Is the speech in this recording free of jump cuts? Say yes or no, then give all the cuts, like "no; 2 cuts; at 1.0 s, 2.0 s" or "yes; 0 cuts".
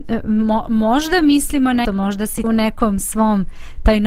no; 2 cuts; at 1.8 s, 2.4 s